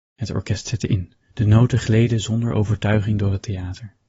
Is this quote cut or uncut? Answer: cut